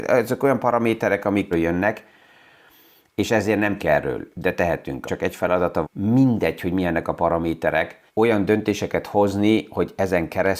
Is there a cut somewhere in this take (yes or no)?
yes